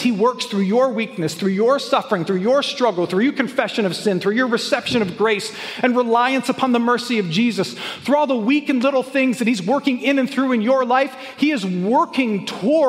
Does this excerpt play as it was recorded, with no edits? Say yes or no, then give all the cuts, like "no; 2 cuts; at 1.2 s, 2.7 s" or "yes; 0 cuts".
yes; 0 cuts